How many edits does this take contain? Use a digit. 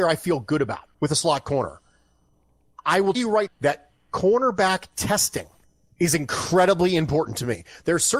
4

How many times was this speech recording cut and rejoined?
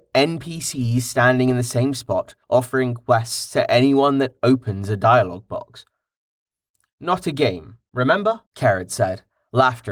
2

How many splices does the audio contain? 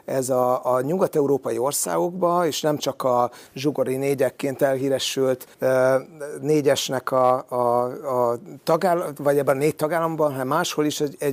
2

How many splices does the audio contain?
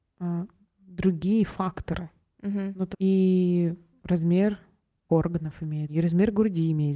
3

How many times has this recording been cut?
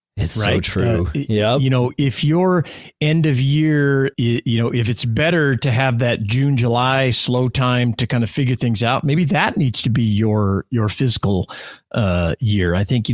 1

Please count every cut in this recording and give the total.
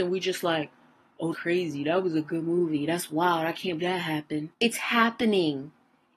3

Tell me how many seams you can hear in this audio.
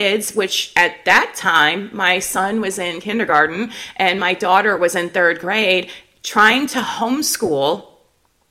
0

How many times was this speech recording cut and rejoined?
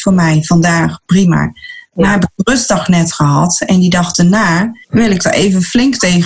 1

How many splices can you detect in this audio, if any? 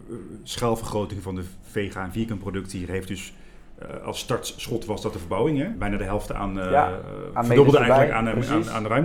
1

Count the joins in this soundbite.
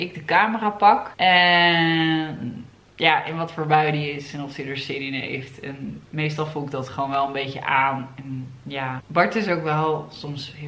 0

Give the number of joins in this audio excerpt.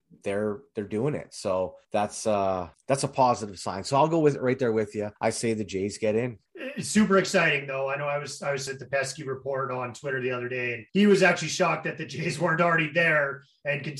6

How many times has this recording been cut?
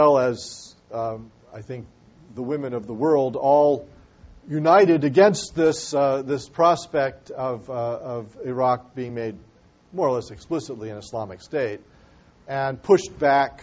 0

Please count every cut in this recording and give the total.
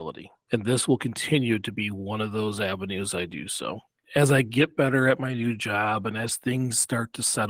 0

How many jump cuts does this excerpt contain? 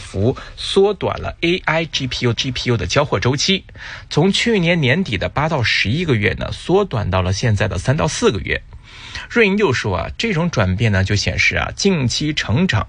1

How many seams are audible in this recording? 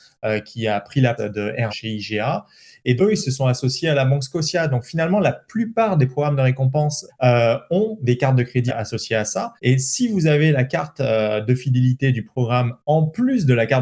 6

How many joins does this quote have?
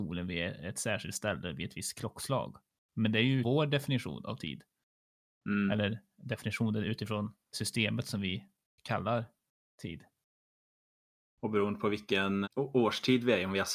3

